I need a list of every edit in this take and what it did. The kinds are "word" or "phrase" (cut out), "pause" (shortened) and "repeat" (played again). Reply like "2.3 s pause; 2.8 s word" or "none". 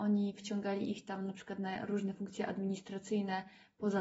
none